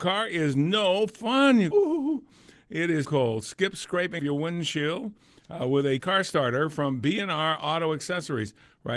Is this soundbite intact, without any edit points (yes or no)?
no